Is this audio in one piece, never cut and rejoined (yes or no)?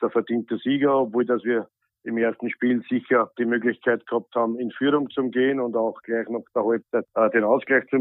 yes